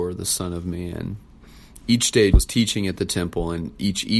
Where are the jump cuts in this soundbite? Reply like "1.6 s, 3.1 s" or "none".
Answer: 2.3 s